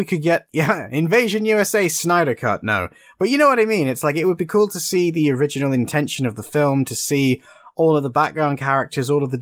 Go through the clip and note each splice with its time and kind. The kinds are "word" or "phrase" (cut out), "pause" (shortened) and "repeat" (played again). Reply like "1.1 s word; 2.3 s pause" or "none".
none